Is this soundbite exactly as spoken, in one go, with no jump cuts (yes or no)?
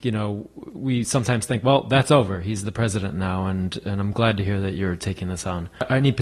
yes